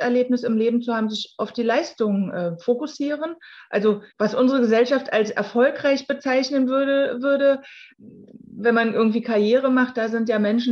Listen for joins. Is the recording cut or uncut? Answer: cut